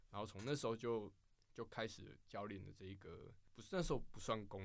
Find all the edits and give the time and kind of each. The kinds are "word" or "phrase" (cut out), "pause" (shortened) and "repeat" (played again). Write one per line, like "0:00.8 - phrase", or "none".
none